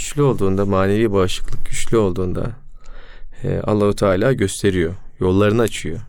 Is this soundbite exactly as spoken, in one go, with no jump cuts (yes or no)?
yes